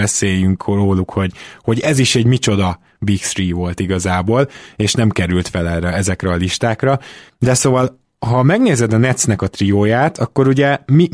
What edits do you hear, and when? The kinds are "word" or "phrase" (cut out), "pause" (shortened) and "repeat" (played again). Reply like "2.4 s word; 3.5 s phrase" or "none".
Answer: none